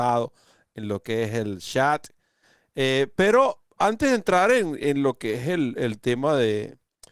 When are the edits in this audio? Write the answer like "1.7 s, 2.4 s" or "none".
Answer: 3.7 s